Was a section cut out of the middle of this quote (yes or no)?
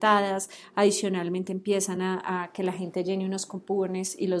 no